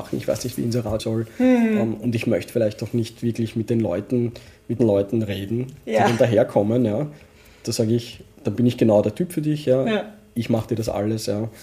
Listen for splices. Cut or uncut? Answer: cut